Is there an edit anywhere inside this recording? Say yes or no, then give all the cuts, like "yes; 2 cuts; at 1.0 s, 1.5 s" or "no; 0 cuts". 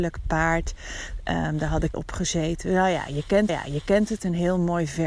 yes; 2 cuts; at 1.9 s, 3.5 s